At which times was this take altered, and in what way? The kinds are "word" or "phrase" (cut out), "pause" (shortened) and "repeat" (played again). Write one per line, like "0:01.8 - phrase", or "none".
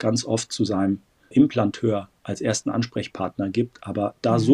0:01.3 - word